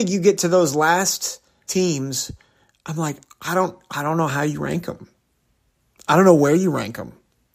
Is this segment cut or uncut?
cut